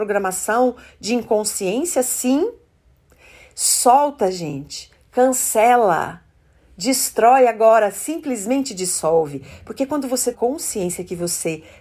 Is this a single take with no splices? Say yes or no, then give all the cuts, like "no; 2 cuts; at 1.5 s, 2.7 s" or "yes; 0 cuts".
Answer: no; 1 cut; at 10.3 s